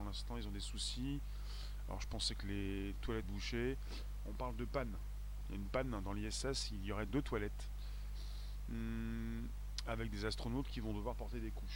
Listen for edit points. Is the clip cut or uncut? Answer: cut